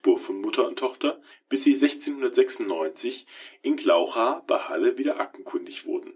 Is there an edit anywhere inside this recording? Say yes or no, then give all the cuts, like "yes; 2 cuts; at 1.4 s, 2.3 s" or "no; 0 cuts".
no; 0 cuts